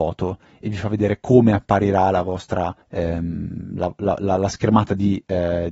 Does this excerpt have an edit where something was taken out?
yes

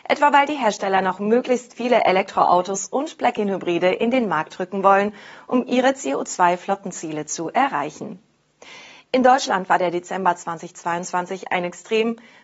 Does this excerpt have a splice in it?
no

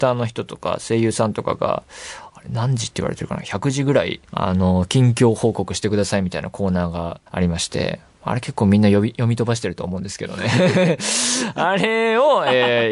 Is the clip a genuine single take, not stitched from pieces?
no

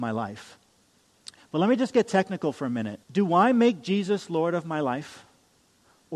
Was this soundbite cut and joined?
yes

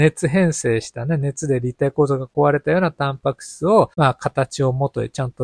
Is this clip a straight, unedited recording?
no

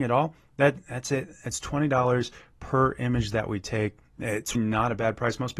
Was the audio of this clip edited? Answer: yes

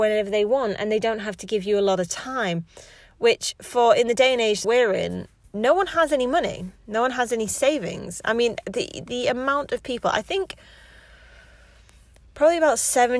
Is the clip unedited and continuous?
no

